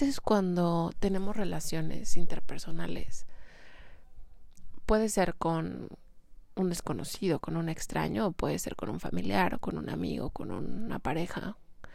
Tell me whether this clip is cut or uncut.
uncut